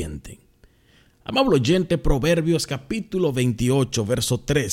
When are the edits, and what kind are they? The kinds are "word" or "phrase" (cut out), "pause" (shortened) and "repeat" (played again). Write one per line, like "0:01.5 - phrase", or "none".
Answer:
none